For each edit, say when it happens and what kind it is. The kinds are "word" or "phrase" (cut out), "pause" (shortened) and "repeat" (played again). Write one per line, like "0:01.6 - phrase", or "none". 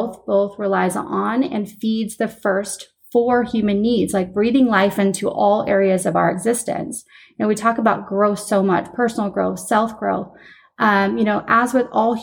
none